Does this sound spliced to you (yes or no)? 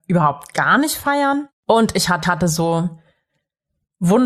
yes